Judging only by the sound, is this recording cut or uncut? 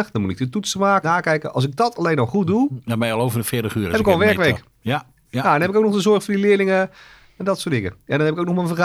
cut